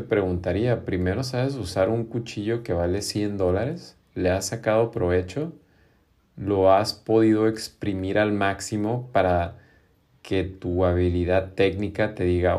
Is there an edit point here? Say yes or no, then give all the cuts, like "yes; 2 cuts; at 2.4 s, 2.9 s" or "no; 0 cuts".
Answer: no; 0 cuts